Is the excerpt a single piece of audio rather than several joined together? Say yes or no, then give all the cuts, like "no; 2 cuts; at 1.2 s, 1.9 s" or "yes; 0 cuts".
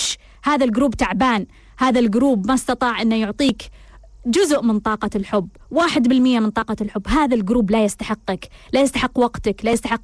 yes; 0 cuts